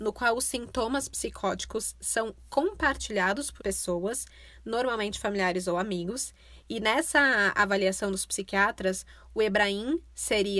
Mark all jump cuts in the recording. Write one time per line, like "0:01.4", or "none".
0:03.6